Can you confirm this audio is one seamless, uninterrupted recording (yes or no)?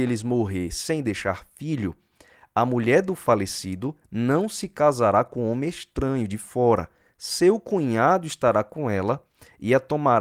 yes